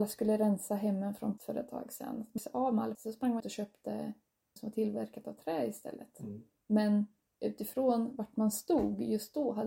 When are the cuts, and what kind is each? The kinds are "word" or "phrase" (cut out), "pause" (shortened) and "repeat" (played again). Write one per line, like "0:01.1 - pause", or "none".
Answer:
0:01.4 - word
0:02.4 - word
0:02.9 - word
0:03.4 - word
0:04.6 - word